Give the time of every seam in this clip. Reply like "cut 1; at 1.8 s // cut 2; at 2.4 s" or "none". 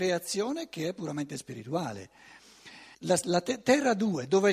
cut 1; at 2.9 s